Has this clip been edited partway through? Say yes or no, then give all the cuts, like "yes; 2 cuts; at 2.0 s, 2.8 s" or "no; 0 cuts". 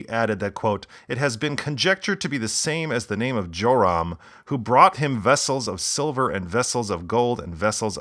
yes; 1 cut; at 4.9 s